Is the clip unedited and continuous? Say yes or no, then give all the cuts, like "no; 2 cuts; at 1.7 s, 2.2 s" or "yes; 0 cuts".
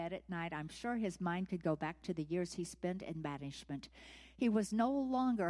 yes; 0 cuts